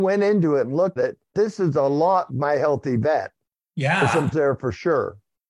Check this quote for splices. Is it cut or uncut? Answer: cut